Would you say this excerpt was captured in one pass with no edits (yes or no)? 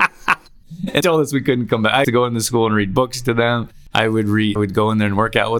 no